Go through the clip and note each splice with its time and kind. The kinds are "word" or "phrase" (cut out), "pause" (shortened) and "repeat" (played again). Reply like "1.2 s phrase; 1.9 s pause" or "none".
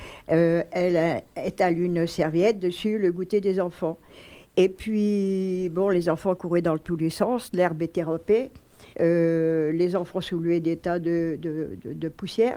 8.9 s pause

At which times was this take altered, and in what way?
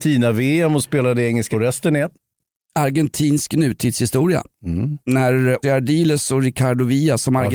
1.5 s word; 5.6 s word

